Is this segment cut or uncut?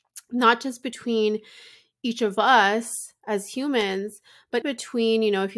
cut